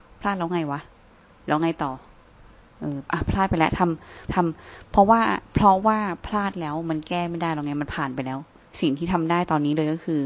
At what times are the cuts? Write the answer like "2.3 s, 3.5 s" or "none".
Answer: 4.3 s, 8.6 s